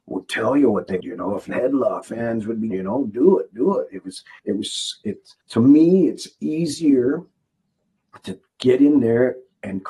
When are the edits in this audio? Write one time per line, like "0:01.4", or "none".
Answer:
0:01.0
0:01.5
0:02.0
0:02.7
0:04.4
0:05.4